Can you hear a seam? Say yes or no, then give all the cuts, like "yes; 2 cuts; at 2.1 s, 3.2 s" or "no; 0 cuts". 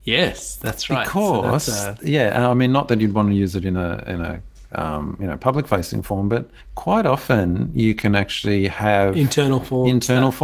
no; 0 cuts